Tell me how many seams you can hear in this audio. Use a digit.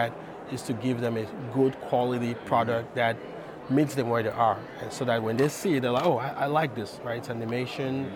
0